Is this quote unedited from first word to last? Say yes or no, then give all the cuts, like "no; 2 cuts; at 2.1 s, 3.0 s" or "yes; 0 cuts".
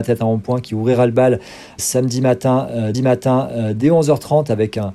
no; 2 cuts; at 1.8 s, 2.9 s